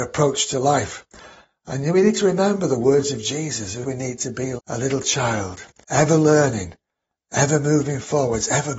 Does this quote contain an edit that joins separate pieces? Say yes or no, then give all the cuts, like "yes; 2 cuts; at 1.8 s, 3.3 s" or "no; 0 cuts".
yes; 3 cuts; at 3.8 s, 4.6 s, 5.8 s